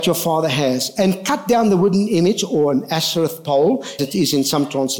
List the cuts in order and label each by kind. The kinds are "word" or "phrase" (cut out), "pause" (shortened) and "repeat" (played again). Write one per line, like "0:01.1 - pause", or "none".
0:04.0 - word